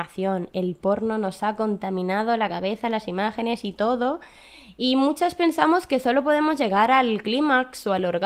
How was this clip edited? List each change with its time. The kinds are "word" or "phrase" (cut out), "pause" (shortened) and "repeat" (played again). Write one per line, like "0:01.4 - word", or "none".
none